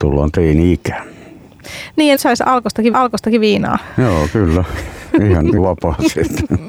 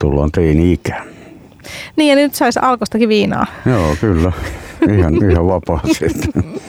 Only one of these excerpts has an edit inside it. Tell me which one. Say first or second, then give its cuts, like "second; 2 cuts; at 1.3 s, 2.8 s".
first; 3 cuts; at 2.1 s, 2.9 s, 5.6 s